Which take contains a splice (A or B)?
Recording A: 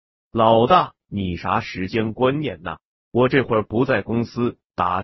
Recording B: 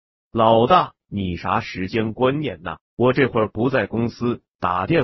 B